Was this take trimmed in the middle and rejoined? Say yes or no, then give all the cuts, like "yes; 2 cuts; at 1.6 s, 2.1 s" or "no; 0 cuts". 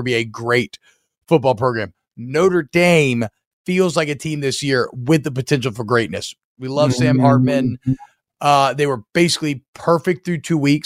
no; 0 cuts